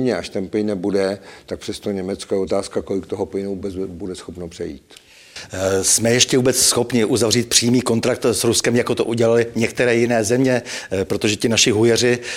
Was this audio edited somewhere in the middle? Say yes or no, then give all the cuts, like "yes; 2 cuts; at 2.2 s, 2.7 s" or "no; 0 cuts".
no; 0 cuts